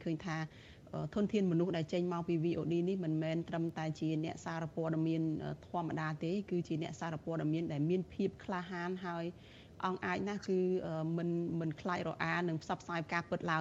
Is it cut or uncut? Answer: uncut